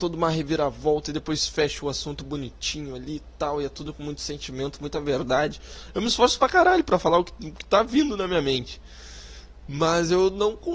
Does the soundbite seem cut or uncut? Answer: uncut